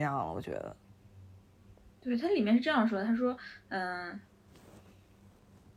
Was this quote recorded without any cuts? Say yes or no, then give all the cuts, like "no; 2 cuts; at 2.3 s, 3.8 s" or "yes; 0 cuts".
yes; 0 cuts